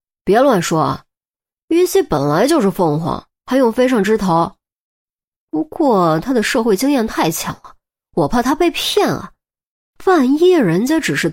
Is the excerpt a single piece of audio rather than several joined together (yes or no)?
yes